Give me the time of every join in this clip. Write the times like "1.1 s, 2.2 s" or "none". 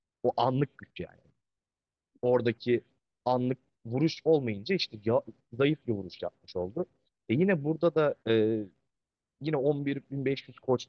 4.2 s, 8.2 s